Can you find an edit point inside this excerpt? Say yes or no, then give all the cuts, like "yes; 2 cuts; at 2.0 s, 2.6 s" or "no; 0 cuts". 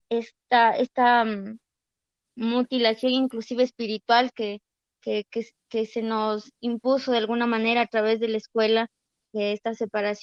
no; 0 cuts